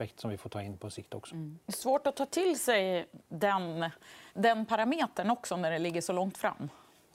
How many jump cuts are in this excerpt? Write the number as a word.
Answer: two